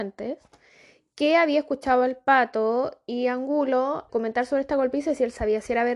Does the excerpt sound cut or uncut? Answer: cut